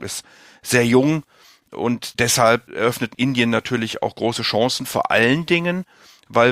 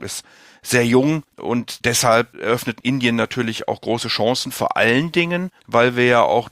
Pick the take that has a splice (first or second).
second